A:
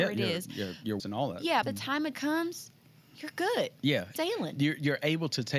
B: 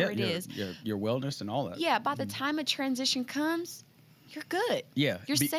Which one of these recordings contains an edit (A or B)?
A